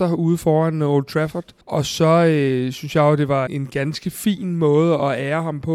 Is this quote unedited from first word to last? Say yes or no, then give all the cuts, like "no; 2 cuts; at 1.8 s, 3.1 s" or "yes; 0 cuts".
no; 2 cuts; at 1.6 s, 3.5 s